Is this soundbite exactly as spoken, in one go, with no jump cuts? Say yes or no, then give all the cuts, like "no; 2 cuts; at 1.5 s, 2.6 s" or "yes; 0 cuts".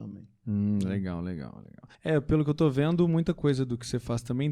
no; 1 cut; at 1.9 s